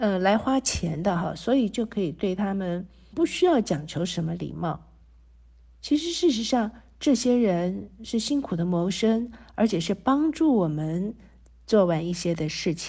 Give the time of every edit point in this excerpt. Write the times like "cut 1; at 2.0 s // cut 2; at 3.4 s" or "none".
cut 1; at 3.1 s